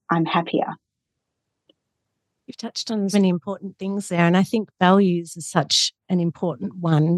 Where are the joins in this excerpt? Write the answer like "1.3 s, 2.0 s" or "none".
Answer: 3.1 s, 6.0 s

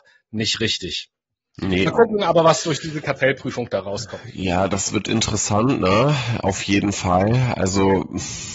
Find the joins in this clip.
none

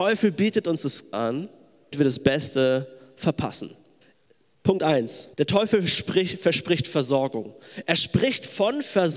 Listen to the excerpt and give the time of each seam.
1.1 s, 1.9 s, 4.0 s, 5.3 s

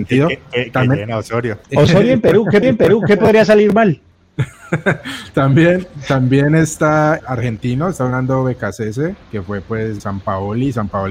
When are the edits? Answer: 1.6 s, 2.6 s, 4.5 s, 7.2 s, 9.2 s, 10.0 s

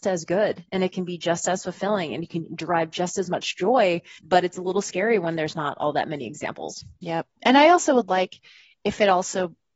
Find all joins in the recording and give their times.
4.2 s, 7.0 s

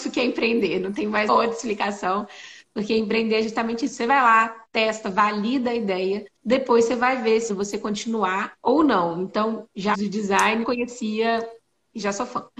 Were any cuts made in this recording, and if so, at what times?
1.3 s, 6.4 s, 7.5 s, 8.6 s, 9.9 s, 10.6 s

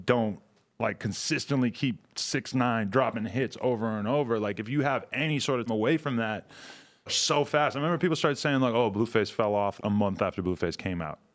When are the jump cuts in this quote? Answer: 5.7 s, 7.1 s, 9.8 s

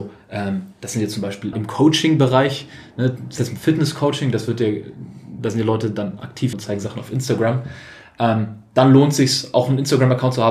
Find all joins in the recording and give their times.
1.5 s, 3.4 s, 6.5 s

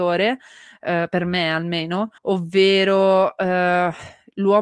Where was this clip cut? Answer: 2.2 s

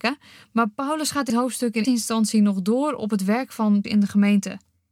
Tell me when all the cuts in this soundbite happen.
1.3 s, 1.8 s, 3.8 s

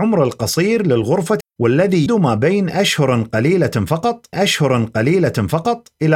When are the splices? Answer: 1.4 s, 2.1 s, 4.3 s

